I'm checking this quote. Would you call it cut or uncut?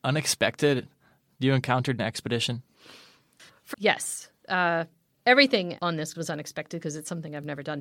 cut